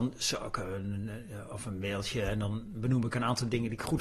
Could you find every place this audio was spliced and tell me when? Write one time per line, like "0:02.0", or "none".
none